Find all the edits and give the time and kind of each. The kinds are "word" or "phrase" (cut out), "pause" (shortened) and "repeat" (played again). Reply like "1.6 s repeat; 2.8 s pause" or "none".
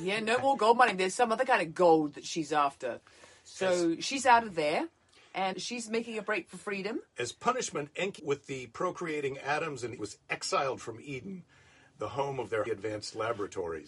5.5 s word; 8.2 s word; 10.0 s word; 12.7 s word

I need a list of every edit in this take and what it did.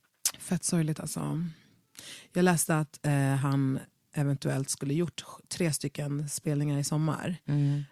none

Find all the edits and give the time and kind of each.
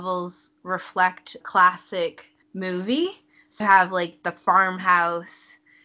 1.4 s word; 2.4 s word; 3.6 s word

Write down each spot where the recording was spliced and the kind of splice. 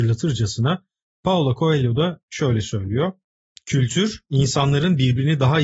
none

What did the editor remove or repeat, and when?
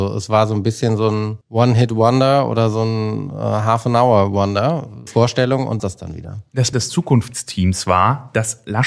1.4 s pause; 5.1 s word; 5.8 s phrase; 6.7 s word

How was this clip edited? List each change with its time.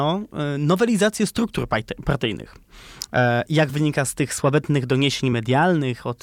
none

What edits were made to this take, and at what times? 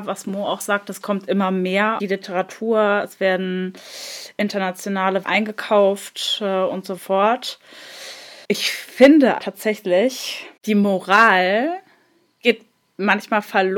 2.0 s phrase; 5.2 s word; 7.0 s phrase; 8.4 s pause; 9.4 s word

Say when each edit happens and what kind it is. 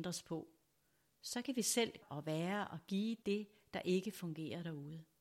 2.0 s word; 3.2 s word

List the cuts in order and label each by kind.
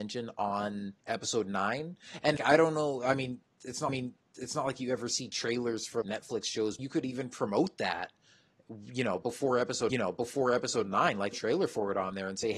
1.0 s pause; 2.4 s word; 3.9 s repeat; 6.0 s word; 6.8 s phrase; 9.9 s repeat; 11.3 s phrase

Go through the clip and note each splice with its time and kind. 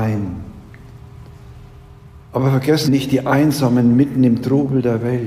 2.2 s pause; 2.9 s word

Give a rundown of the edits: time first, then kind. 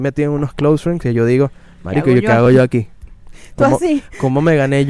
none

